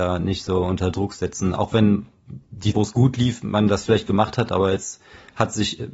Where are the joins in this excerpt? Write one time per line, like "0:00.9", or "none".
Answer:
0:02.7